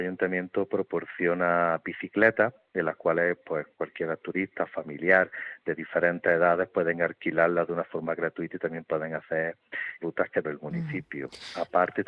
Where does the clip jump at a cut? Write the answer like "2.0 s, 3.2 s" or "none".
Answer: 3.7 s, 10.0 s, 10.4 s